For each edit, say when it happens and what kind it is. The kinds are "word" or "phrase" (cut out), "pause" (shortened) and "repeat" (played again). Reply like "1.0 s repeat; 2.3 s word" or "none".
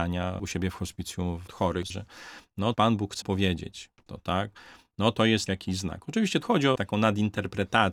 1.5 s word; 1.9 s word; 2.7 s word; 3.2 s word; 4.1 s word; 5.5 s word; 6.4 s word; 6.8 s word

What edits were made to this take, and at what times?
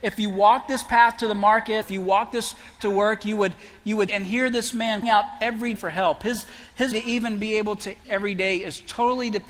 1.8 s word; 2.8 s word; 4.1 s word; 5.0 s word; 5.8 s word; 6.9 s word; 8.0 s word

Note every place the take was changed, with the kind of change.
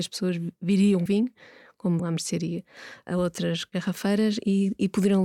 1.1 s phrase; 2.0 s word

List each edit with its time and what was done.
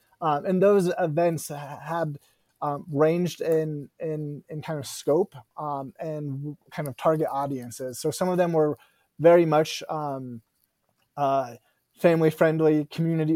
6.6 s pause

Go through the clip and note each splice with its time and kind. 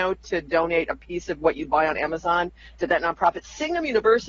none

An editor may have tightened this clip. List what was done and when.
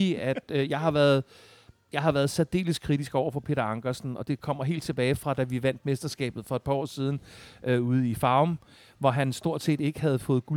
none

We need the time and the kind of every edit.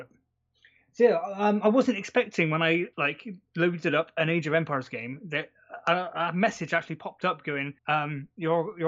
2.9 s pause; 7.8 s pause

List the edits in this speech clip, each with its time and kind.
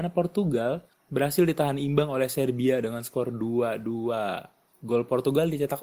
none

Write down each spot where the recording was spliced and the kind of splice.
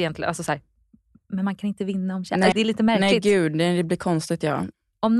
2.5 s word

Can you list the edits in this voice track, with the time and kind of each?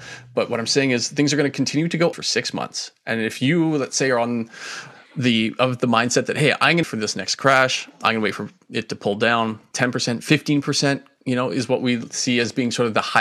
2.1 s word; 6.8 s word; 9.7 s word

